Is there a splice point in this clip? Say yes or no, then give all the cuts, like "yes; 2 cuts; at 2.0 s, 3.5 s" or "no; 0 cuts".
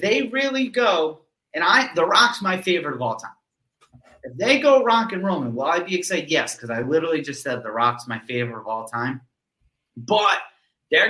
no; 0 cuts